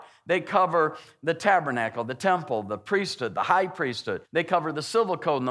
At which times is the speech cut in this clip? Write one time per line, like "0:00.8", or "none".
0:04.2